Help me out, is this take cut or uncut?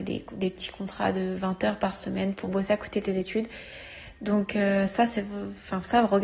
uncut